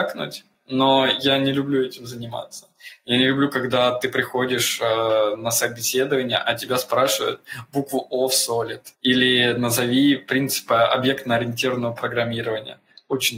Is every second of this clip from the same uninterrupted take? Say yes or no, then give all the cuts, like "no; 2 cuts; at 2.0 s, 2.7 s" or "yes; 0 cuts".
no; 1 cut; at 8.9 s